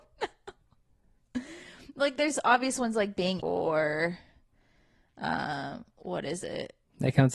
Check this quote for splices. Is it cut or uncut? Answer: cut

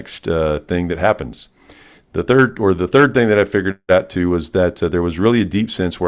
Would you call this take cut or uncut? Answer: uncut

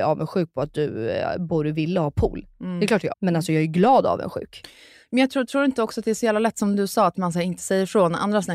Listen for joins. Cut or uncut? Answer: cut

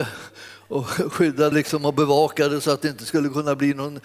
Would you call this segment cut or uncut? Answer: cut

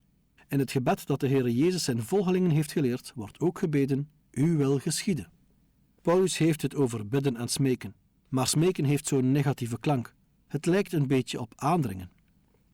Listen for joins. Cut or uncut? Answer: uncut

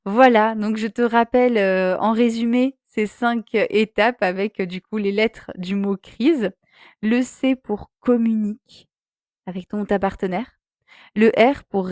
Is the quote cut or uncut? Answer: uncut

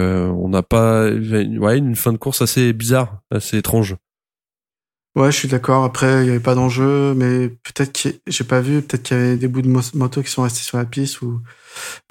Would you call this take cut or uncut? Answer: uncut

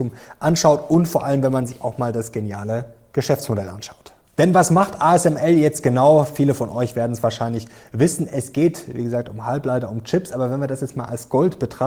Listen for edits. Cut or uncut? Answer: uncut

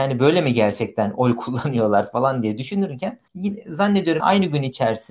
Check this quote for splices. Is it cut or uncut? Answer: cut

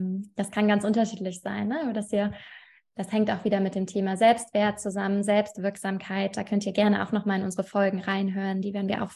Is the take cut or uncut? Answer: uncut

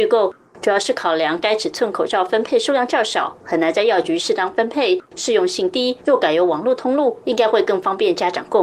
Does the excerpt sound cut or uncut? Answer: cut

